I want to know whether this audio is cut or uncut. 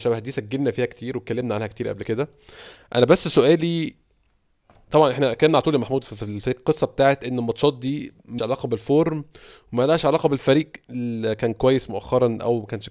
cut